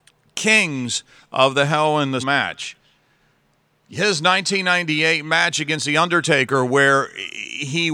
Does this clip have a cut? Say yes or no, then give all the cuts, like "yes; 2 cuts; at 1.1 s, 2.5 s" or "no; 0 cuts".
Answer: yes; 1 cut; at 2.2 s